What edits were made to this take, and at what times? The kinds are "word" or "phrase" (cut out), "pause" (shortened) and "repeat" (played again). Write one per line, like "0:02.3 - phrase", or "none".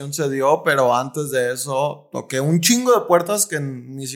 none